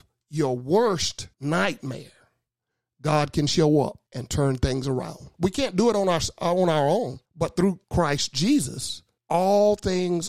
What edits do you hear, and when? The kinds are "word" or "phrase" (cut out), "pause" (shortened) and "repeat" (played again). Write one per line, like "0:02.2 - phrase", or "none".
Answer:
0:01.3 - pause
0:04.1 - pause
0:05.3 - pause
0:07.3 - pause
0:07.8 - pause
0:09.2 - pause